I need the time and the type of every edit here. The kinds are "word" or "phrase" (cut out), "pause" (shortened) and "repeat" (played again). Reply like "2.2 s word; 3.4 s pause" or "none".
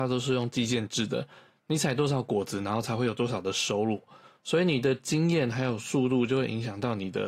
none